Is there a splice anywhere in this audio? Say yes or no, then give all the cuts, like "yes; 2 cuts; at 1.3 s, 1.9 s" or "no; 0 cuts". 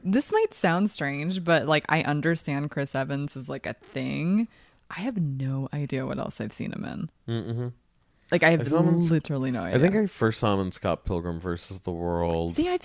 no; 0 cuts